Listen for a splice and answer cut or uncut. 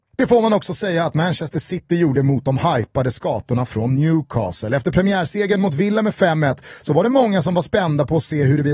uncut